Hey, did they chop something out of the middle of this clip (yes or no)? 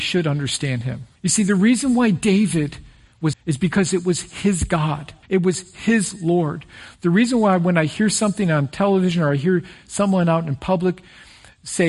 yes